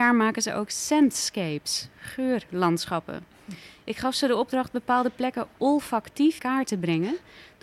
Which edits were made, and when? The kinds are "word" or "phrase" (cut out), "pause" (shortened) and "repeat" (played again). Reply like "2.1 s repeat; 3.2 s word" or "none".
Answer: 6.4 s word